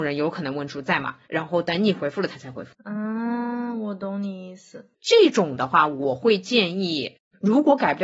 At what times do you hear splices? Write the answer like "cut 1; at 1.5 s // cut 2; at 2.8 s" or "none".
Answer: cut 1; at 4.9 s